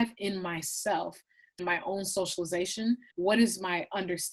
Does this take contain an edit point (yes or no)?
yes